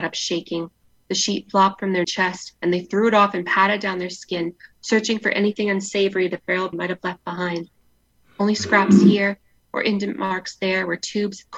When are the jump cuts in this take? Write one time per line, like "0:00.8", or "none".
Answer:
0:02.0
0:06.7